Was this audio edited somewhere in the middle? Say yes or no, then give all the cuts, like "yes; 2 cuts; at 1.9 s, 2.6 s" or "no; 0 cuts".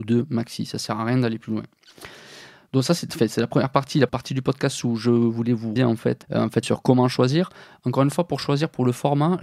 yes; 4 cuts; at 4.1 s, 5.8 s, 6.2 s, 6.6 s